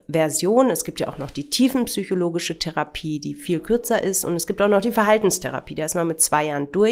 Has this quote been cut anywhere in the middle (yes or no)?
no